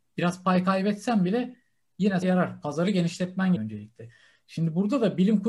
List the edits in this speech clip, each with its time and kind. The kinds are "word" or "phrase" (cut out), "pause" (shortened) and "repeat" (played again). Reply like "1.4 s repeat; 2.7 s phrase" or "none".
2.2 s word; 3.6 s word

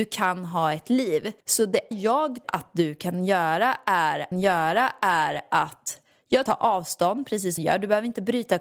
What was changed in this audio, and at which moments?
1.4 s pause; 1.9 s word; 2.4 s word; 4.3 s repeat; 6.5 s phrase; 7.6 s word

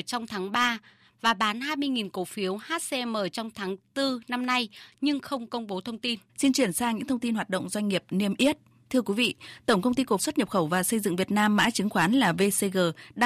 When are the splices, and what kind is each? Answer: 6.3 s pause; 10.2 s word

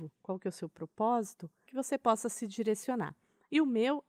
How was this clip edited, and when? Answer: 1.7 s word

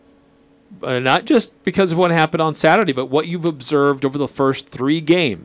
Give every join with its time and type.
none

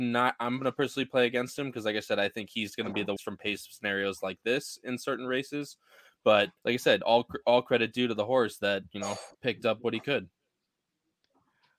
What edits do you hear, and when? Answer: 3.2 s phrase; 6.6 s pause; 9.3 s pause

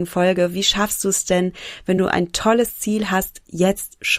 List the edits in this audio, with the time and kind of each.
none

